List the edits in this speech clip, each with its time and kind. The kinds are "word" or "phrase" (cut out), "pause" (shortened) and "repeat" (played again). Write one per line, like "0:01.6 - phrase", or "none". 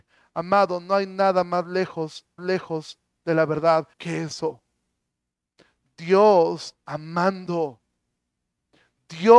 0:02.4 - repeat
0:03.9 - pause
0:06.8 - phrase